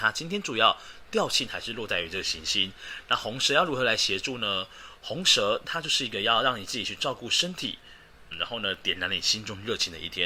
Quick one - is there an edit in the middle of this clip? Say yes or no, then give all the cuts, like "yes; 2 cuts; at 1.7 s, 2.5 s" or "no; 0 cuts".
yes; 1 cut; at 8.3 s